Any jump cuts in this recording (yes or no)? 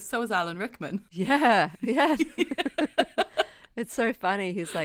yes